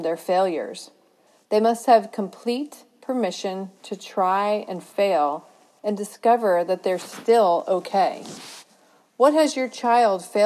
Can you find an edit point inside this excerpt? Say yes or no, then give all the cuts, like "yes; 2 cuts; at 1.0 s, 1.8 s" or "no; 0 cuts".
no; 0 cuts